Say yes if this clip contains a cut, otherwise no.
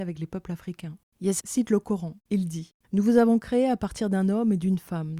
yes